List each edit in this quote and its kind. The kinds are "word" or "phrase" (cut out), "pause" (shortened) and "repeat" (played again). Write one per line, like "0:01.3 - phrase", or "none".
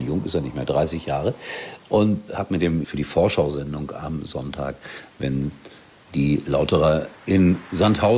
0:02.3 - word
0:02.8 - phrase